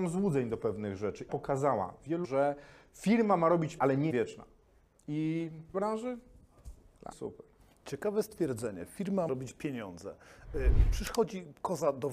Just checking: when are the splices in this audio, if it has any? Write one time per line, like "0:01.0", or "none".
0:01.3
0:02.2
0:03.8
0:04.1
0:05.7
0:07.1
0:09.3